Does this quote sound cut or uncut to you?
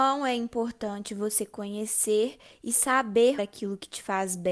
cut